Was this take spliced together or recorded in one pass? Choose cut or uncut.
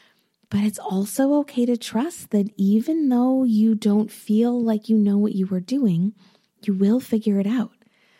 uncut